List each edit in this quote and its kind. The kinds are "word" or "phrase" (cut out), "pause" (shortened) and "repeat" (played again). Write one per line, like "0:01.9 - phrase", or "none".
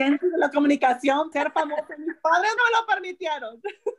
0:01.3 - word
0:02.6 - word